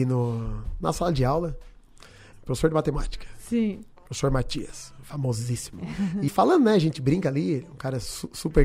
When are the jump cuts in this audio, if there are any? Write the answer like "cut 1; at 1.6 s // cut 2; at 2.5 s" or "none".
cut 1; at 2.3 s // cut 2; at 6.3 s